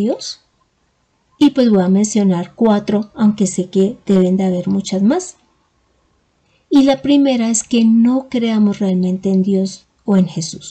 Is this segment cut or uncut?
uncut